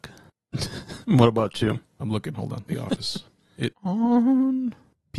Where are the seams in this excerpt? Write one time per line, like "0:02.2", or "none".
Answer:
0:02.7
0:03.7